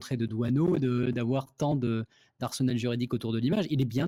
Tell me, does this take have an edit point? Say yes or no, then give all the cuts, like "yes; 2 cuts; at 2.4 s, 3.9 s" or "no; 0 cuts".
no; 0 cuts